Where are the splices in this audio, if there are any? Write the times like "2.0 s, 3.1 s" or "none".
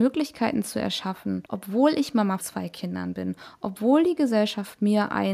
1.5 s, 2.4 s